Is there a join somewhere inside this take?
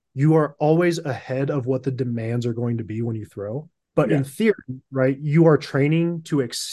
yes; 1 cut; at 3.8 s

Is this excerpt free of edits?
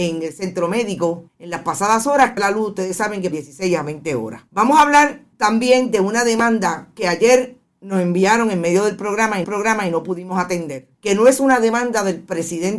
no; 7 cuts; at 1.3 s, 2.4 s, 3.3 s, 4.5 s, 5.3 s, 9.4 s, 10.9 s

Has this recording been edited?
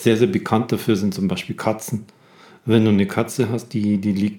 no; 0 cuts

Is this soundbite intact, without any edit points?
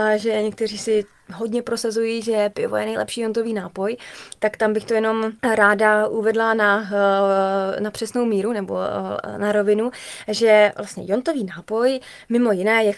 no; 1 cut; at 5.4 s

